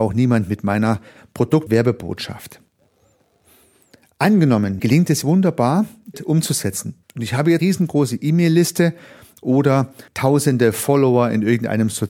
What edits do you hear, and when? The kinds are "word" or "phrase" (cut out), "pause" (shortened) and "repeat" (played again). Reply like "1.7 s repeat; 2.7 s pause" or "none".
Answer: 1.7 s word; 4.8 s word; 5.2 s word; 6.1 s phrase; 7.0 s pause; 7.6 s word; 10.1 s pause

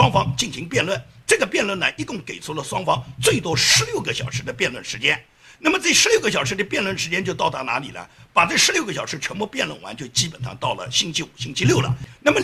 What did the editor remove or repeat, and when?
none

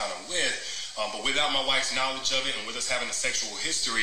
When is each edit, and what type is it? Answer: none

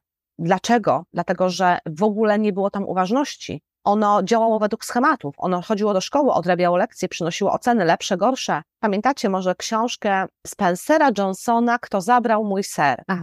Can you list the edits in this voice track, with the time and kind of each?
8.7 s pause

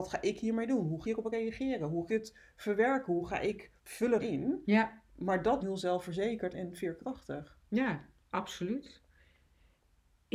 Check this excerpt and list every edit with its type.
1.0 s phrase; 2.1 s phrase; 3.8 s pause; 4.2 s word; 5.6 s phrase; 6.5 s word; 7.6 s pause

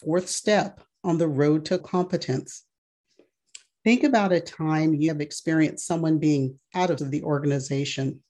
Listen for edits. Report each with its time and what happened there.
1.8 s word; 5.1 s word; 7.0 s phrase

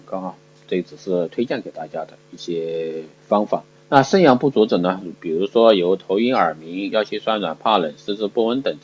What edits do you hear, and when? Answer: 3.2 s pause; 3.8 s pause

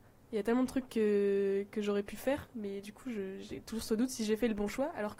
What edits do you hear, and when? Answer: none

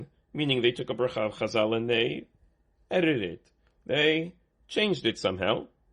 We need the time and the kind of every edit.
none

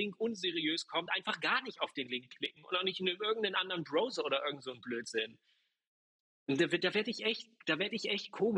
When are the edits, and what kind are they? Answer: none

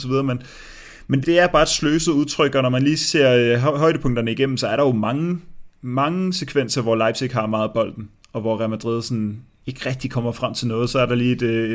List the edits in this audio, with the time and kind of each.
1.2 s word

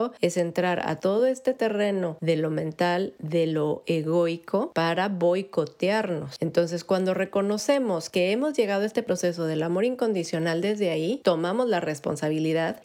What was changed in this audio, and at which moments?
none

